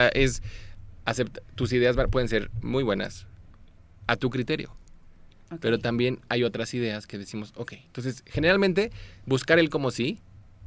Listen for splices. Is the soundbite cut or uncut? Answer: uncut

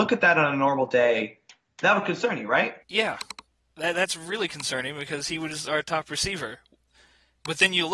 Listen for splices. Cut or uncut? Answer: uncut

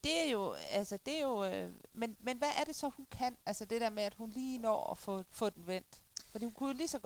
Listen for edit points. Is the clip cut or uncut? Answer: cut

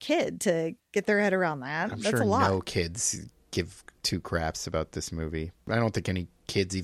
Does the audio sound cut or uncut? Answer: uncut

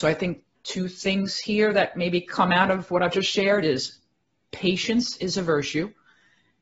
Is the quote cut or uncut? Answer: uncut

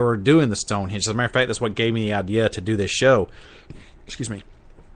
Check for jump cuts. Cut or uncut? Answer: uncut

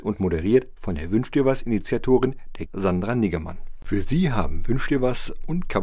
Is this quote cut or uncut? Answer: cut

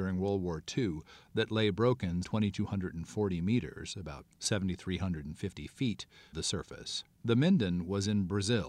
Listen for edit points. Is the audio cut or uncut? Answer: cut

